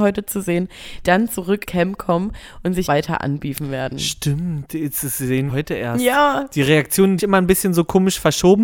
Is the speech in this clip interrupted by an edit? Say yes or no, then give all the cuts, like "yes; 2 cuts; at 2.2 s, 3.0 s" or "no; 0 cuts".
yes; 5 cuts; at 1.0 s, 1.6 s, 2.9 s, 5.5 s, 7.2 s